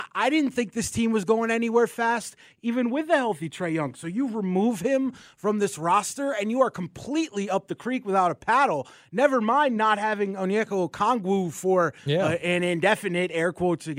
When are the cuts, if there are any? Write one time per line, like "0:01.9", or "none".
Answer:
none

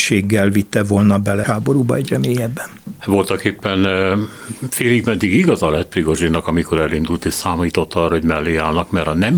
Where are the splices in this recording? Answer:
0:01.4

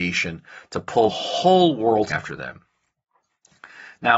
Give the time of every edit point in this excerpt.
0:01.1
0:02.1

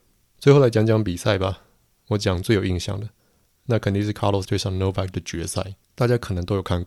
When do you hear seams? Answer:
0:04.4
0:05.1
0:05.8

